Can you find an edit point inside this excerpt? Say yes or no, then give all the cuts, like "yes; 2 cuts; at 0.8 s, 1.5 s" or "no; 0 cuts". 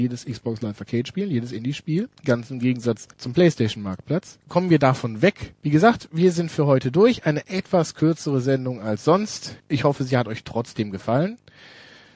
yes; 5 cuts; at 2.2 s, 3.1 s, 4.4 s, 5.6 s, 9.6 s